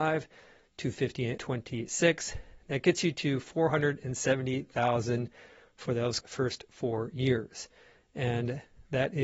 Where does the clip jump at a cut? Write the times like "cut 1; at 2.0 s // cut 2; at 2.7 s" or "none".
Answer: cut 1; at 1.4 s // cut 2; at 6.2 s